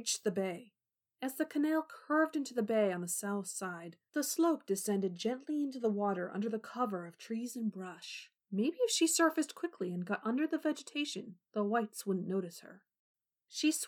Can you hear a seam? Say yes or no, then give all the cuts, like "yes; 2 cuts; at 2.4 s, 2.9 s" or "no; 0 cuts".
yes; 1 cut; at 8.4 s